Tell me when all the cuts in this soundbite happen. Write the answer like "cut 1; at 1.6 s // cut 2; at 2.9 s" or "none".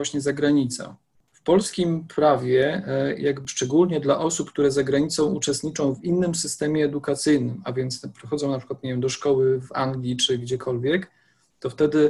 none